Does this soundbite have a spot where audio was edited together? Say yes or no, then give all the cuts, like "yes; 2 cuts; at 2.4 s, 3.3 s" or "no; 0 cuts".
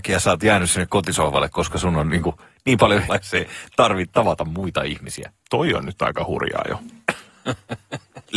yes; 2 cuts; at 3.1 s, 5.4 s